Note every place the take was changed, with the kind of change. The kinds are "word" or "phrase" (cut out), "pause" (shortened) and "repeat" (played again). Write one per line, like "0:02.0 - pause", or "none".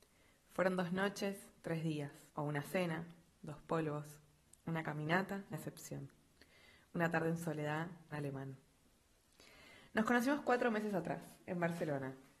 0:02.3 - pause
0:05.5 - word
0:08.1 - phrase

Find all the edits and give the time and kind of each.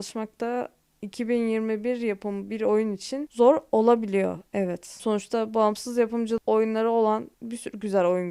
0:07.3 - pause

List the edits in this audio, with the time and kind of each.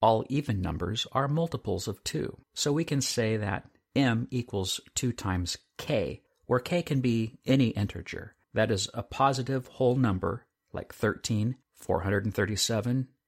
0:02.4 - pause
0:06.3 - pause
0:08.4 - pause
0:11.6 - pause

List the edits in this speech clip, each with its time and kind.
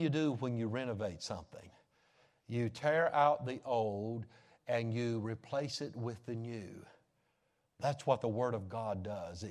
none

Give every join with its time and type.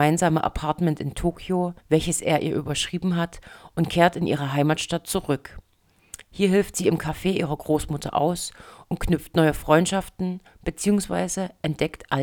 0:01.8 - pause

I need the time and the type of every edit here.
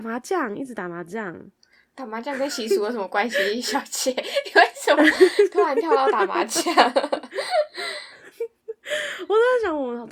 none

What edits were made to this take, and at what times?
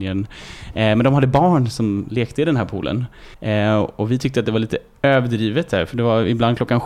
0:03.3 - pause

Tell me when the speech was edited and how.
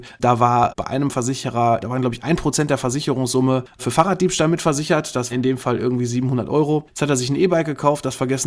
0:01.8 - phrase
0:05.3 - word

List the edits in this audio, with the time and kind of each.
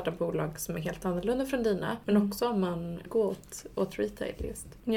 0:03.1 - word

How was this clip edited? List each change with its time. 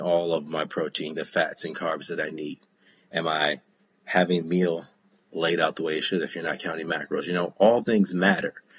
0:01.1 - word
0:04.4 - word
0:07.8 - word

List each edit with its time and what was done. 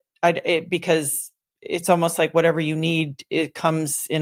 none

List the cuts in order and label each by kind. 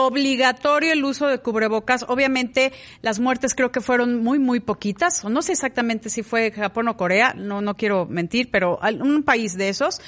none

